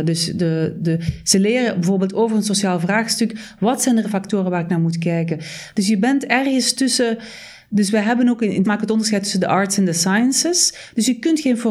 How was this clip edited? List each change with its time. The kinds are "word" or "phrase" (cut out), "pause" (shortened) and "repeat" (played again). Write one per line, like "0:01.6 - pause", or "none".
0:04.0 - word
0:08.6 - word

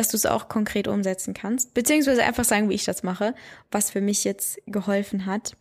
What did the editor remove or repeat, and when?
0:03.9 - word

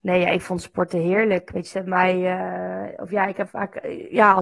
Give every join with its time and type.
0:03.5 - word

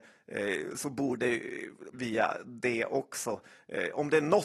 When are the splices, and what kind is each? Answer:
0:01.9 - phrase

